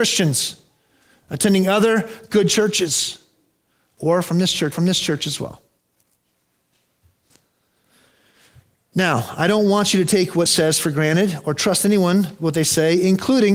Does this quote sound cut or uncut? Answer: cut